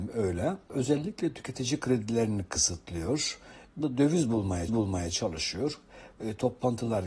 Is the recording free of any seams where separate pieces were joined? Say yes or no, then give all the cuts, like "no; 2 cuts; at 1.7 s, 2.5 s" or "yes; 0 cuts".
no; 2 cuts; at 3.8 s, 4.7 s